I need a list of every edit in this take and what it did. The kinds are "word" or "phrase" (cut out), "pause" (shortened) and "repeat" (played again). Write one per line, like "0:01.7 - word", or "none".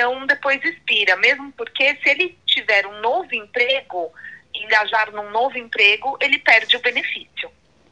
none